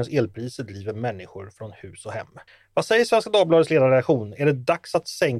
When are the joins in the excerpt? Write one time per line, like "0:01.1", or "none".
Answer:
0:02.5